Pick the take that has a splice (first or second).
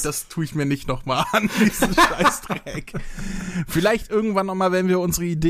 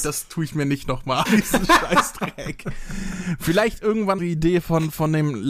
second